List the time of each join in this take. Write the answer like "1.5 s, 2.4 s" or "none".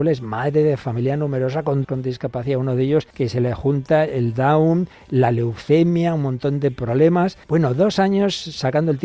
1.8 s, 3.1 s, 7.4 s